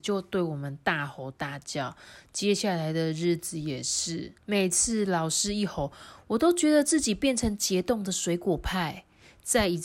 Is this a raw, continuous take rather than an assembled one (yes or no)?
no